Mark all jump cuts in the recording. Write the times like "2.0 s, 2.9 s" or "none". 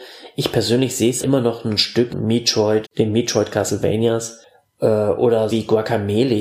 1.2 s, 2.1 s, 2.8 s, 5.5 s